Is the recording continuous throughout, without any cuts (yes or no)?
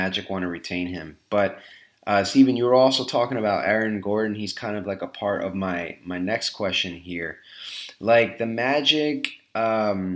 yes